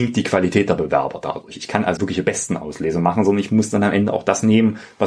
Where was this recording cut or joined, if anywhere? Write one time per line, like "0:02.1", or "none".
0:02.0

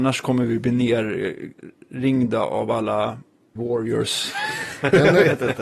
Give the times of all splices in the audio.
0:03.6

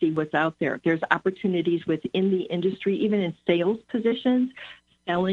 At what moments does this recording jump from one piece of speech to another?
none

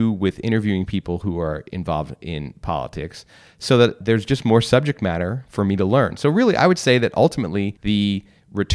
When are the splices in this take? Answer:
none

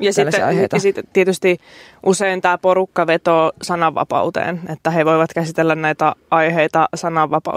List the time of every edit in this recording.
none

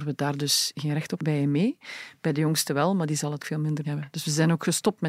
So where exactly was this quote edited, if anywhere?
0:01.2
0:03.4
0:03.8

